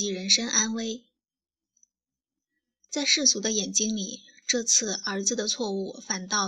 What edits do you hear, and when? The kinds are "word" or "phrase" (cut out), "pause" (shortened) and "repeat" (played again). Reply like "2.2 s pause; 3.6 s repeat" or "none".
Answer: none